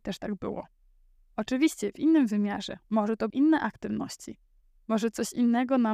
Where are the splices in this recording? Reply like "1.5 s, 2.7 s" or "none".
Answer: 2.8 s, 3.3 s